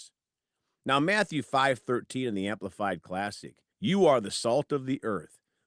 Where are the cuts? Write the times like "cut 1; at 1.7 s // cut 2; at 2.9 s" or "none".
cut 1; at 3.7 s

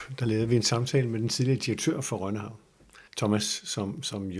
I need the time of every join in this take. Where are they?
cut 1; at 3.1 s

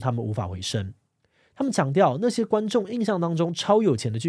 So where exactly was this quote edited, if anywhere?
none

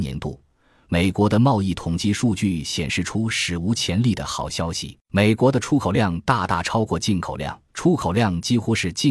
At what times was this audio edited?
cut 1; at 5.0 s // cut 2; at 7.7 s

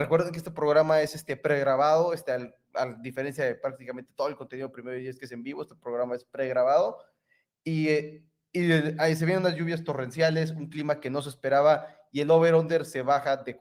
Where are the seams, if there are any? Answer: none

